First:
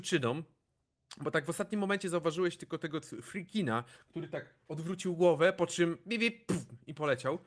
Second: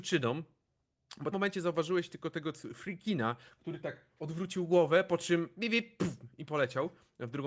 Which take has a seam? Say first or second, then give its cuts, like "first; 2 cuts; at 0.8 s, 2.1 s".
second; 1 cut; at 1.3 s